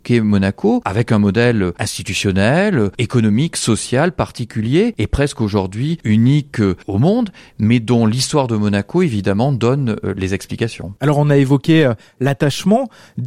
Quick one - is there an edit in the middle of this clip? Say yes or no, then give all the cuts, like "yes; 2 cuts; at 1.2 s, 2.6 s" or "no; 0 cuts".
no; 0 cuts